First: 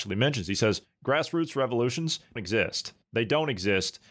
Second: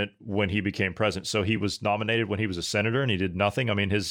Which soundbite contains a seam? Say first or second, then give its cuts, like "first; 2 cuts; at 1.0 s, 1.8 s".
first; 1 cut; at 2.4 s